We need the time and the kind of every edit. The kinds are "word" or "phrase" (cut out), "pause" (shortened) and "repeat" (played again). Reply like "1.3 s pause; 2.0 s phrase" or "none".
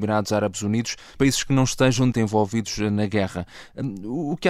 1.2 s word; 2.1 s word